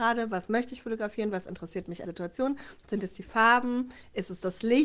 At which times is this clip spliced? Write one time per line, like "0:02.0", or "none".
0:02.0